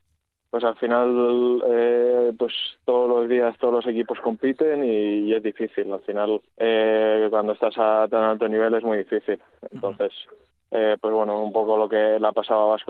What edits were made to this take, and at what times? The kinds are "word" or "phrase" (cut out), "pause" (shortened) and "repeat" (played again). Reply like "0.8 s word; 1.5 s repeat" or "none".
6.5 s pause